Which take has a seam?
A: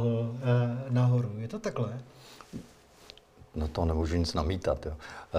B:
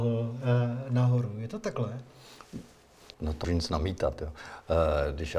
B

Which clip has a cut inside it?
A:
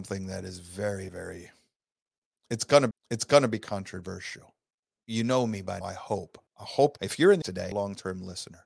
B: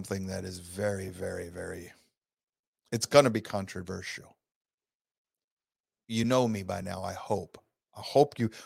A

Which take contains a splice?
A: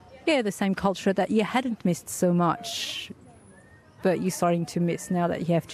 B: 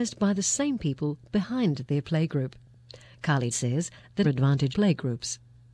B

